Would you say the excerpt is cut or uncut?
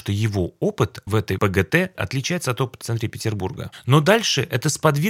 cut